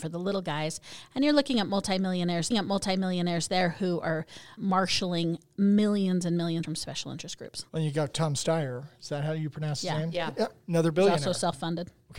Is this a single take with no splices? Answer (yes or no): no